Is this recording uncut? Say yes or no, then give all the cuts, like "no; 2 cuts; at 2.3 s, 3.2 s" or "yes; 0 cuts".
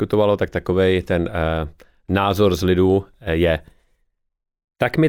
yes; 0 cuts